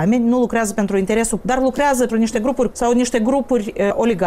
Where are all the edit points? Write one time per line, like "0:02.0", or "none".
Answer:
0:01.4
0:02.1
0:02.7